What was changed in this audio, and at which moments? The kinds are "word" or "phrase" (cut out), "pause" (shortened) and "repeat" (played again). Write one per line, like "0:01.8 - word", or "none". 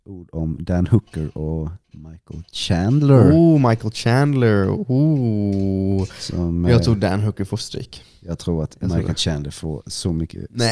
none